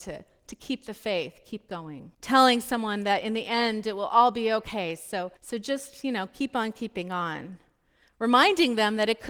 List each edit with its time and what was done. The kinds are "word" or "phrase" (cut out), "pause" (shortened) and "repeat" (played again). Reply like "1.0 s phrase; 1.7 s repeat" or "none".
2.1 s pause; 5.4 s pause

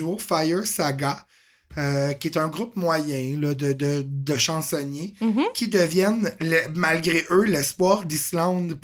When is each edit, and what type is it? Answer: none

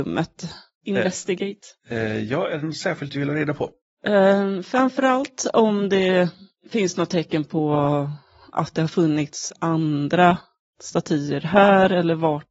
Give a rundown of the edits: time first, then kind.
none

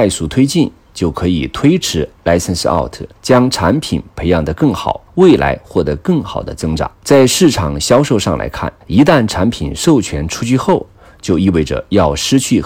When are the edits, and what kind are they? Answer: 3.2 s pause; 5.1 s pause; 6.9 s pause; 8.8 s pause

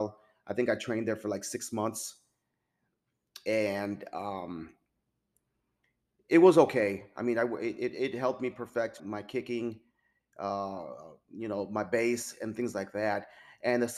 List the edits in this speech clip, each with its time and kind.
9.0 s word

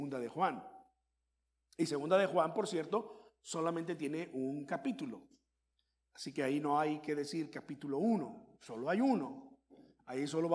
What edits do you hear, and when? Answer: none

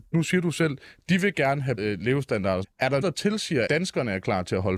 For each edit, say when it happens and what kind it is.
1.8 s word; 2.6 s word; 3.0 s word; 3.7 s word

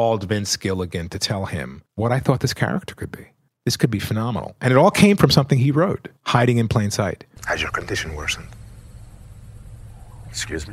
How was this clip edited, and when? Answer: 1.9 s pause; 3.5 s pause; 6.2 s pause

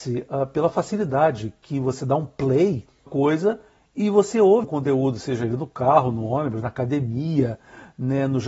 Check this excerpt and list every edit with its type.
3.1 s phrase; 4.6 s word

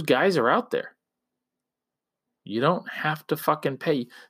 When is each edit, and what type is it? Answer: none

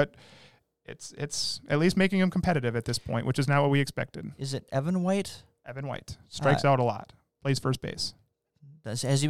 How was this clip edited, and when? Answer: none

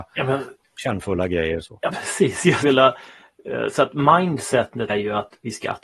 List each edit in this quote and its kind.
1.9 s word; 2.6 s word; 4.9 s word

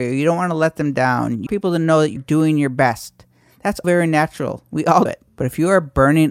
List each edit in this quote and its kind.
1.5 s word; 2.2 s word; 3.8 s word; 5.1 s word

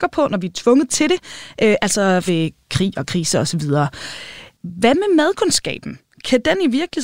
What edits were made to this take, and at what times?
2.3 s word; 4.5 s pause

